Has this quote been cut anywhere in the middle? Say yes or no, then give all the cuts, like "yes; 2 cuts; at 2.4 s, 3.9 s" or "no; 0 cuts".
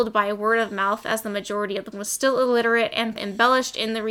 yes; 2 cuts; at 1.9 s, 3.2 s